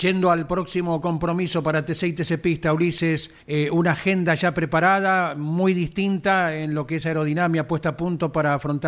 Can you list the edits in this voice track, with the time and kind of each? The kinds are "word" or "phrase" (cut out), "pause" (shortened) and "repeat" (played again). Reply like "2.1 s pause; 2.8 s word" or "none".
3.4 s pause